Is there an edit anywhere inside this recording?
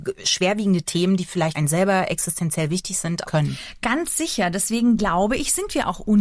yes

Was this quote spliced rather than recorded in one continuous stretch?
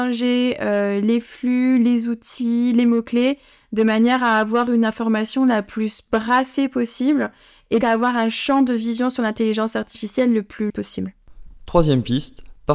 yes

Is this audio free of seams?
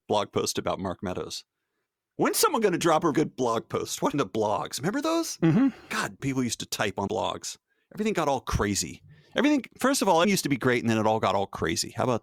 no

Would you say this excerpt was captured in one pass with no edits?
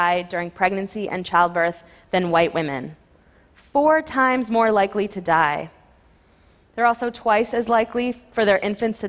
yes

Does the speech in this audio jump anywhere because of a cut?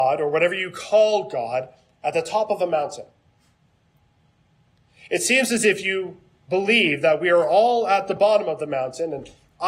no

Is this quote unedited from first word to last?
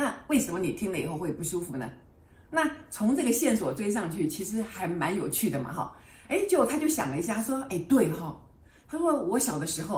yes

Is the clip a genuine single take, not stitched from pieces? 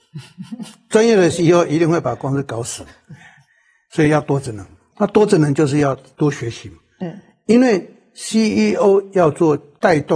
yes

